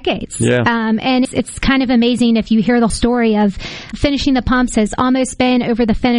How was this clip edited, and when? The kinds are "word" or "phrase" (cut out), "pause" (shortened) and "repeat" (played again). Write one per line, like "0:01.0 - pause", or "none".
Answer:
0:01.2 - word
0:02.9 - word
0:03.9 - word